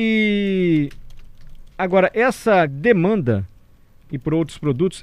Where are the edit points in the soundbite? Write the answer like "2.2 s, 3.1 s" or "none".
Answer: 1.7 s, 2.7 s, 4.1 s